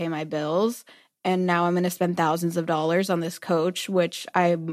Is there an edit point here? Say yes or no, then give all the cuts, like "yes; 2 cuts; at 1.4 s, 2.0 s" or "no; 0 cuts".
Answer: no; 0 cuts